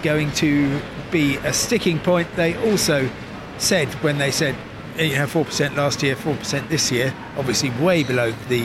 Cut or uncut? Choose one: uncut